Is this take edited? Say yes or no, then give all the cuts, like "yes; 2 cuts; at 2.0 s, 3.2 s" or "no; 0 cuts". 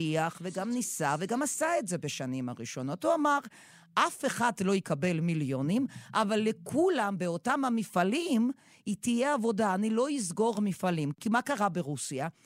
no; 0 cuts